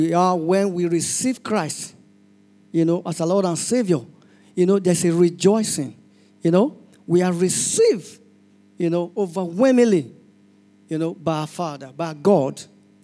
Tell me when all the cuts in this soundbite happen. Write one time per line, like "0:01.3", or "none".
none